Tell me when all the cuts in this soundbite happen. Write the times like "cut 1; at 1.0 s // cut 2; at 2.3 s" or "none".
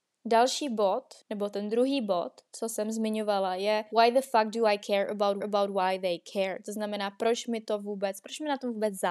cut 1; at 1.2 s // cut 2; at 3.9 s // cut 3; at 5.4 s